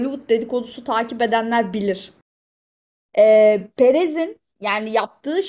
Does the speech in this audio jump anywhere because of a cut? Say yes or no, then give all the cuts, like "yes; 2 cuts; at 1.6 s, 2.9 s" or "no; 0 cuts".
no; 0 cuts